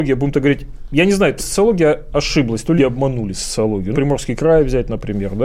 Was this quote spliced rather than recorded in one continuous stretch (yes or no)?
yes